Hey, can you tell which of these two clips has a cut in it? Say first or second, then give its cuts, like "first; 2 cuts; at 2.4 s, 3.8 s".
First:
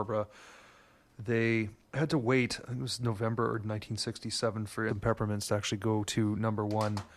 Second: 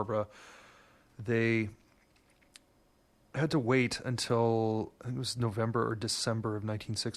first; 4 cuts; at 1.8 s, 2.6 s, 3.6 s, 4.9 s